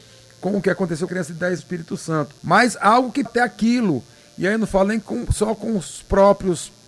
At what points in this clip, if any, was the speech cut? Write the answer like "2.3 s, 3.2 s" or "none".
1.1 s, 1.6 s, 2.4 s, 3.3 s